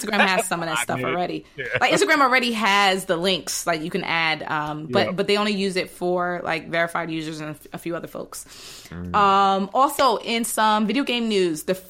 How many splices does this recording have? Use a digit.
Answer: 0